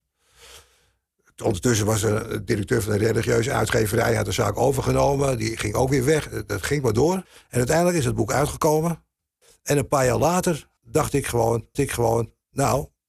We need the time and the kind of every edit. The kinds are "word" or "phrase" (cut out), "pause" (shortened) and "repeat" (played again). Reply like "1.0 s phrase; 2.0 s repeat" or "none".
7.2 s pause; 9.4 s pause; 10.8 s pause; 11.7 s repeat